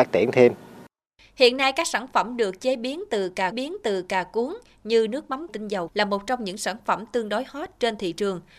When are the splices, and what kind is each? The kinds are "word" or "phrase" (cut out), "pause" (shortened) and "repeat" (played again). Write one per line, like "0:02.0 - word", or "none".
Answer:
0:03.5 - repeat
0:05.5 - phrase
0:05.9 - phrase

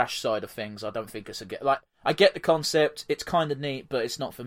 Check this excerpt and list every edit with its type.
0:01.5 - word

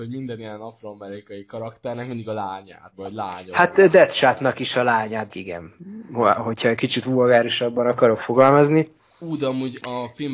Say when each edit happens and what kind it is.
0:02.9 - word
0:05.3 - word

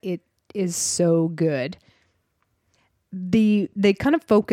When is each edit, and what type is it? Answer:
none

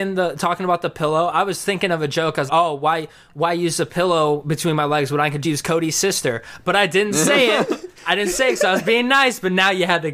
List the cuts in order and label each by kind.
0:02.5 - word
0:05.4 - word
0:08.0 - pause

